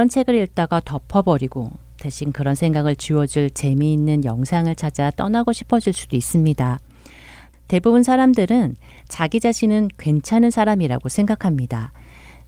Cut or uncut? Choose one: uncut